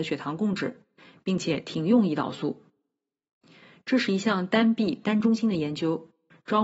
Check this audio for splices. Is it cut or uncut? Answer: uncut